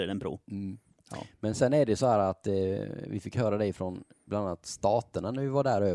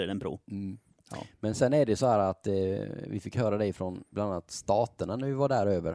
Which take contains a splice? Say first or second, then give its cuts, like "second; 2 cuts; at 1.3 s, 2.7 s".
second; 1 cut; at 4.1 s